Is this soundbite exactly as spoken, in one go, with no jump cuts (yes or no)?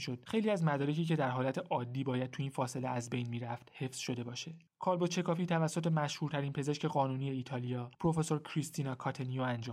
no